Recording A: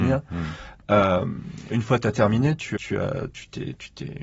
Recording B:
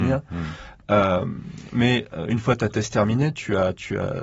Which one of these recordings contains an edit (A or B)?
A